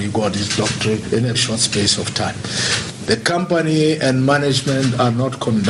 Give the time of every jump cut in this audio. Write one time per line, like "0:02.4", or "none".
0:01.3